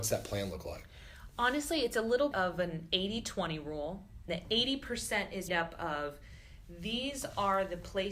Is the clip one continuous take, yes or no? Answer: no